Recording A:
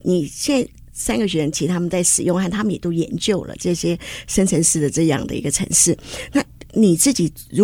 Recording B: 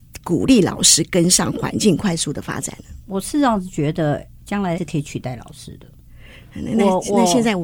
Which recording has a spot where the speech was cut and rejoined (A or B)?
B